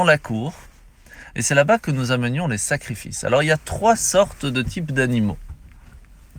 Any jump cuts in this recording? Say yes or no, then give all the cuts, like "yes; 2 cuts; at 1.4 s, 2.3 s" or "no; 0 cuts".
no; 0 cuts